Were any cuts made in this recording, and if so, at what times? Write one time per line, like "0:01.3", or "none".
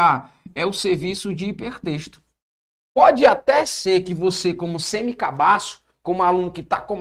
none